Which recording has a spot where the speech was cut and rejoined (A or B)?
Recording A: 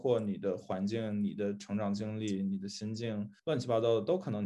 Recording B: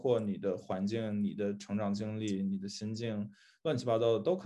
A